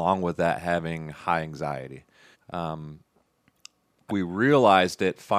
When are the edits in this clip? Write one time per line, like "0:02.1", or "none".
0:02.3
0:04.1